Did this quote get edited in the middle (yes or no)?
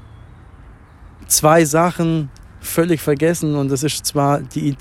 no